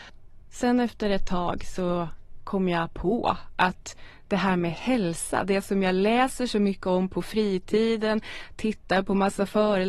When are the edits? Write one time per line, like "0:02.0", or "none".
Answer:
none